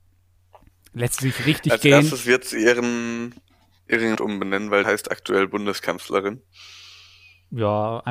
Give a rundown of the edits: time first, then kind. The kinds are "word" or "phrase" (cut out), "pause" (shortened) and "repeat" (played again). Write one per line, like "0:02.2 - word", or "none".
0:04.1 - word
0:04.8 - word